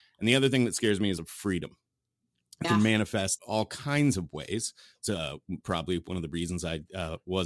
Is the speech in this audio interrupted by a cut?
yes; 4 cuts; at 1.2 s, 2.6 s, 3.4 s, 5.6 s

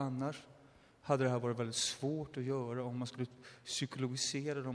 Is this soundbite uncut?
yes; 0 cuts

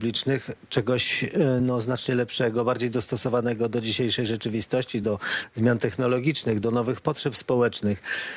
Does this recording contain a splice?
no; 0 cuts

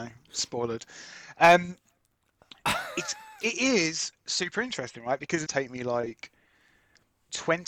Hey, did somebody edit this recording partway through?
yes; 2 cuts; at 3.4 s, 5.5 s

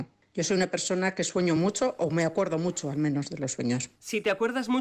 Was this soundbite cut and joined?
no; 0 cuts

